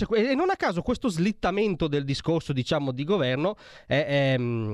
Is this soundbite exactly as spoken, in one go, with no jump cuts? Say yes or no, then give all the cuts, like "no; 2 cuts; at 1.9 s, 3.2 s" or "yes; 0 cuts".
yes; 0 cuts